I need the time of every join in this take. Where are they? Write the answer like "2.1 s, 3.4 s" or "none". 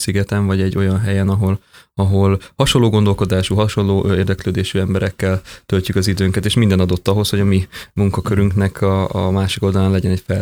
none

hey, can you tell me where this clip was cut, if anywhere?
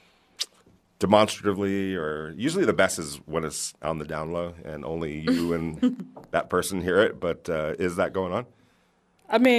none

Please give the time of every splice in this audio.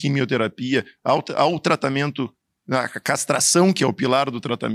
none

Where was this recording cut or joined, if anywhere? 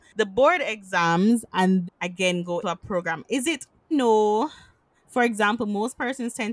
1.8 s, 2.6 s, 3.9 s

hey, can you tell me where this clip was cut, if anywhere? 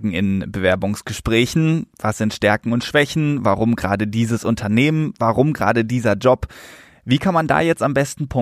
none

